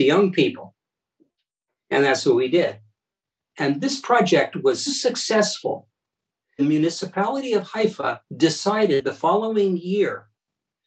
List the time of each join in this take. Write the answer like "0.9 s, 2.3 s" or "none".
4.9 s, 6.6 s, 8.3 s